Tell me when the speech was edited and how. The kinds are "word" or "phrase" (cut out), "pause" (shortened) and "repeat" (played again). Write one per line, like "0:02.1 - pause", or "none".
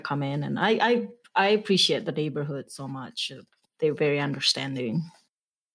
none